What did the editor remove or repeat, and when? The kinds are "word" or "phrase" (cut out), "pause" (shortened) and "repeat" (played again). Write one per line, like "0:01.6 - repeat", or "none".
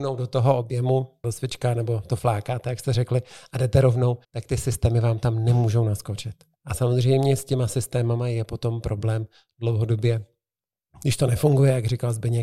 0:01.2 - word
0:04.2 - pause
0:06.5 - pause